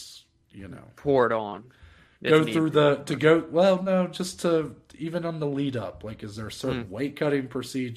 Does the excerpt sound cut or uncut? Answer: uncut